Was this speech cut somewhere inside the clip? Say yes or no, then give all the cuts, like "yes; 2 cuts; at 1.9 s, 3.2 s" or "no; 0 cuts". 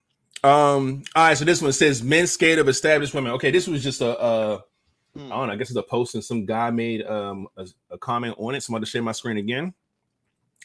no; 0 cuts